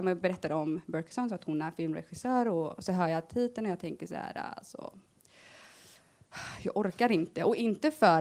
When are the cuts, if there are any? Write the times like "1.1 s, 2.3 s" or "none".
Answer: none